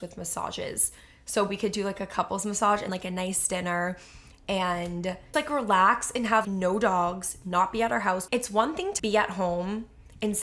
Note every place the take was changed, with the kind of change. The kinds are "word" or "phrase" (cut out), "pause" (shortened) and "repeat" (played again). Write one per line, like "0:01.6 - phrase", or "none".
0:02.9 - word
0:05.3 - word
0:06.4 - word
0:08.3 - word
0:09.0 - word